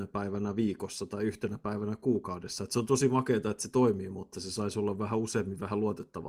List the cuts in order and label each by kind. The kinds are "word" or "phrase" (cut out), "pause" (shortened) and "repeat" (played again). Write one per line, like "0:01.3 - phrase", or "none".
none